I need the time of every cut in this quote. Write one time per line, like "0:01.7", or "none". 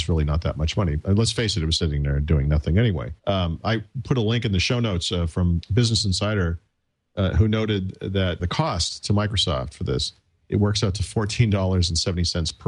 0:01.8
0:03.2
0:05.6
0:08.4